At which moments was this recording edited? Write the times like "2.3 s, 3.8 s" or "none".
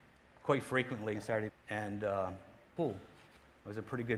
1.1 s, 1.5 s, 2.8 s